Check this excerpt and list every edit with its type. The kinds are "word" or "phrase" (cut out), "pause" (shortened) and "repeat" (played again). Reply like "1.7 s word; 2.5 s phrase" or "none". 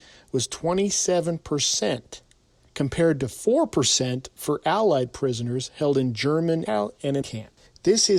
6.7 s word; 7.2 s word